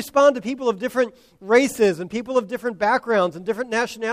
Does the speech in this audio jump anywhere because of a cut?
no; 0 cuts

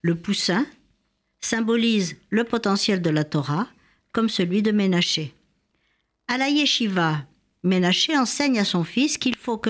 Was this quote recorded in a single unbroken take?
yes; 0 cuts

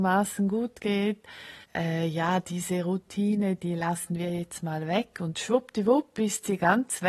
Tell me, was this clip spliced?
yes; 1 cut; at 1.6 s

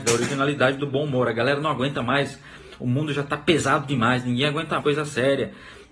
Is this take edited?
yes; 1 cut; at 4.8 s

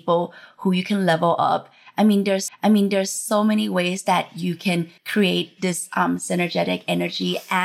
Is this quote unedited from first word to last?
no; 2 cuts; at 2.5 s, 5.0 s

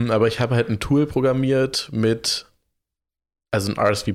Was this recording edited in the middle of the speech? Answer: no; 0 cuts

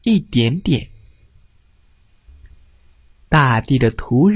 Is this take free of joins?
yes; 0 cuts

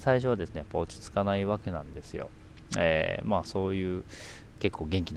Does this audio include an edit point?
no; 0 cuts

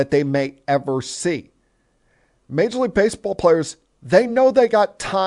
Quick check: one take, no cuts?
yes; 0 cuts

